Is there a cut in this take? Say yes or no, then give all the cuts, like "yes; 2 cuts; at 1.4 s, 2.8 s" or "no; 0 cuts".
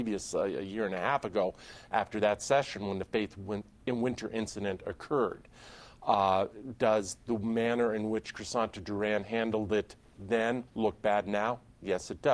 yes; 1 cut; at 10.7 s